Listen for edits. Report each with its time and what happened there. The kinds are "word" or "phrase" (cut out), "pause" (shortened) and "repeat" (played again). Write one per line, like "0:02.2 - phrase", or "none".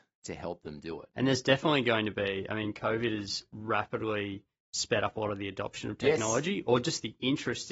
none